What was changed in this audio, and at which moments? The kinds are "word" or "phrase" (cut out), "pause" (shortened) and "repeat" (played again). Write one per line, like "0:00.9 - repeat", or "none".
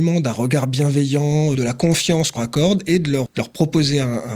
0:01.5 - word
0:02.4 - word
0:03.3 - word

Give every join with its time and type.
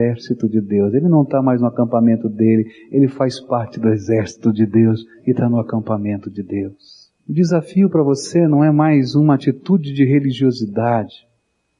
0:07.2 - pause

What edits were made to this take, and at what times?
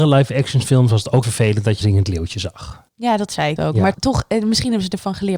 0:01.2 - word
0:01.8 - word
0:02.9 - pause
0:03.6 - word
0:03.9 - word

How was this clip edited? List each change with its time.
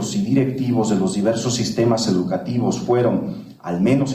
none

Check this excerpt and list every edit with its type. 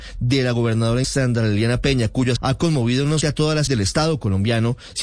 0:01.0 - word
0:02.4 - word
0:03.2 - word
0:03.7 - word

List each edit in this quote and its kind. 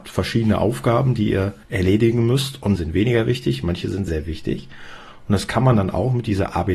0:01.6 - pause
0:02.8 - phrase
0:04.1 - word

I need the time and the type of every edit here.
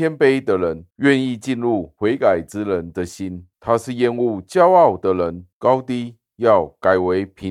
0:00.9 - pause
0:03.5 - pause
0:05.5 - pause

